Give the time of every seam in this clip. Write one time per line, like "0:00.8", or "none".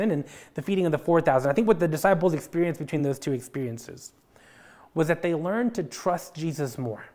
none